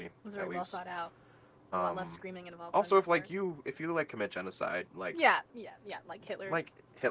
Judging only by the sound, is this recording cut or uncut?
uncut